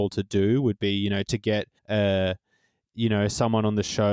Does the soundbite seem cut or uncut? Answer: cut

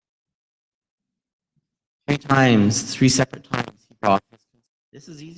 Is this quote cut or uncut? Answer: uncut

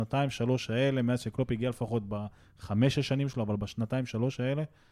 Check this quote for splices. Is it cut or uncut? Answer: uncut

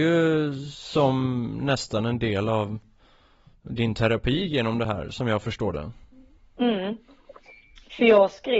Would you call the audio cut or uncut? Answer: uncut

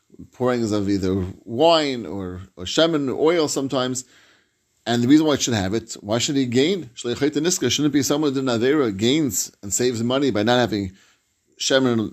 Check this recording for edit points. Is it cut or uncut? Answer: uncut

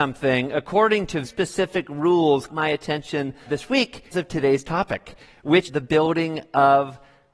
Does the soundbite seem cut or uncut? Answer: cut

